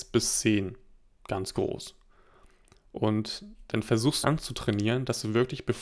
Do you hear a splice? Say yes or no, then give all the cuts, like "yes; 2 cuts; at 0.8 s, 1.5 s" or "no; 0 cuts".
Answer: yes; 1 cut; at 4.2 s